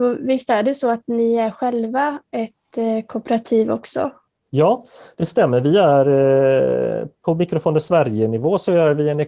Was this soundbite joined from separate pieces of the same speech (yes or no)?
no